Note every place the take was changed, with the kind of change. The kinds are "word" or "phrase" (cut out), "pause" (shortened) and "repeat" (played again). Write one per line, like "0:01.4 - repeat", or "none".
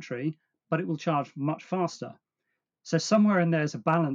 none